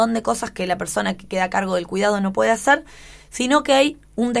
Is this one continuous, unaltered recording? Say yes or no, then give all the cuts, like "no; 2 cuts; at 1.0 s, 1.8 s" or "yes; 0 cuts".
yes; 0 cuts